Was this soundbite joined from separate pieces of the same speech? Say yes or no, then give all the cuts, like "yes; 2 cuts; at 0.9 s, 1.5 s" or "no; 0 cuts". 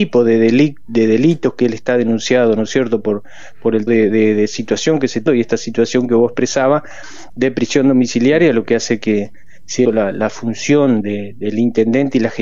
yes; 4 cuts; at 3.9 s, 5.3 s, 9.8 s, 11.0 s